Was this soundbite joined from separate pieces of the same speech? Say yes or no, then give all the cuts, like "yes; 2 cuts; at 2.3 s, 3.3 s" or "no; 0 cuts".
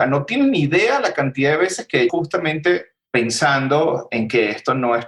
yes; 1 cut; at 2.1 s